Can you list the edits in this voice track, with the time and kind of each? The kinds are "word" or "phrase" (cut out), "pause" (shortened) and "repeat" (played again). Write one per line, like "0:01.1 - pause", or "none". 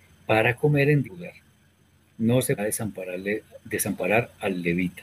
0:01.0 - word
0:02.6 - word